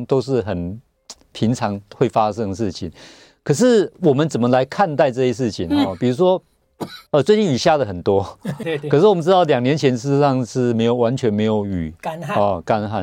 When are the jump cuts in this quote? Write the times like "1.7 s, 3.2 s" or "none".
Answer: 7.1 s, 8.6 s